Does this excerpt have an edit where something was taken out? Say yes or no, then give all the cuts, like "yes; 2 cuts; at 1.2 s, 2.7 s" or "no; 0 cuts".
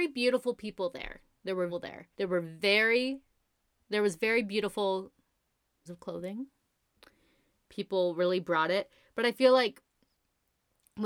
yes; 3 cuts; at 1.7 s, 2.1 s, 5.9 s